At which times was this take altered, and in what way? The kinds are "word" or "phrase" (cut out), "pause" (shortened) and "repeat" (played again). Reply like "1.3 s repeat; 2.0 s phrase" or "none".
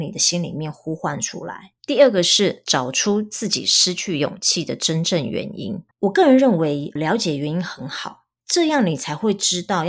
1.8 s pause; 5.9 s pause; 7.0 s word